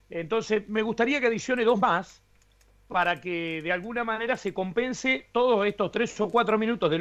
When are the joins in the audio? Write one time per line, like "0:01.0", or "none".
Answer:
none